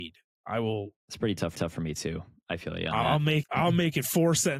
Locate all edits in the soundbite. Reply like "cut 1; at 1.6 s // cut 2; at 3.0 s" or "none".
cut 1; at 1.0 s // cut 2; at 1.6 s // cut 3; at 3.4 s